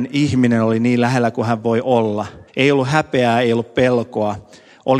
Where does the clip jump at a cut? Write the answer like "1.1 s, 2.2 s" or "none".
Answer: 2.5 s